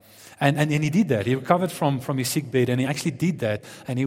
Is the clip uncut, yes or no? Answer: yes